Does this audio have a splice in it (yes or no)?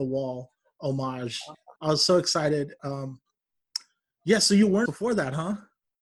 yes